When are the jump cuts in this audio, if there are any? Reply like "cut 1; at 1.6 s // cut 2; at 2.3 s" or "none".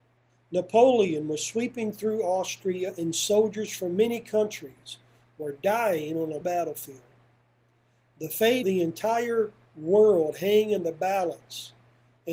cut 1; at 6.4 s // cut 2; at 8.6 s